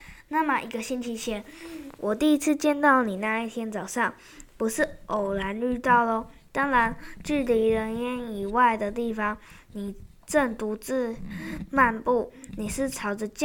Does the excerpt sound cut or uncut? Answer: uncut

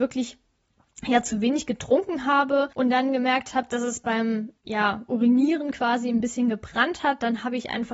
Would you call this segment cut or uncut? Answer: cut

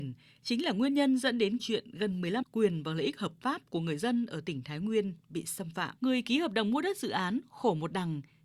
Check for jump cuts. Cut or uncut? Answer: cut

